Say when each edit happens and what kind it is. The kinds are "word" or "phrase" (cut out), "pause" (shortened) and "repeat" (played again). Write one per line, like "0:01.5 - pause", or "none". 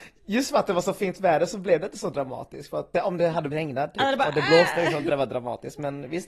0:02.9 - word
0:03.5 - word
0:05.1 - word